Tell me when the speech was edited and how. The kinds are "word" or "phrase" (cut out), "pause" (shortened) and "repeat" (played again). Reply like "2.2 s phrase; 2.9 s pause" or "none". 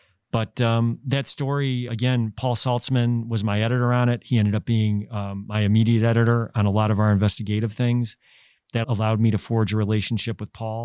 1.9 s word; 8.8 s word